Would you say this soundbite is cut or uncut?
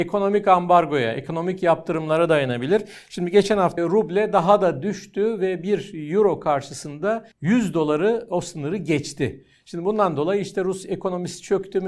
cut